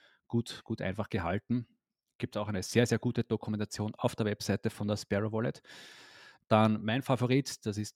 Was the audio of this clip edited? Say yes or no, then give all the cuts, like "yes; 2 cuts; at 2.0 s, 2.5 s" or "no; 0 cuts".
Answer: no; 0 cuts